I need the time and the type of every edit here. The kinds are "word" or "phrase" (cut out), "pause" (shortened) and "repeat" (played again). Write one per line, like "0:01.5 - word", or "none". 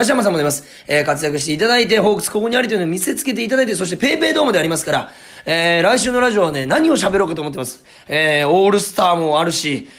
none